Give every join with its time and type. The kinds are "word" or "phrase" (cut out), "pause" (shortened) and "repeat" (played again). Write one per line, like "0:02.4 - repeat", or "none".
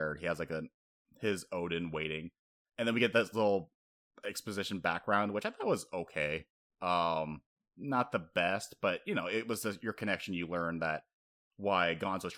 none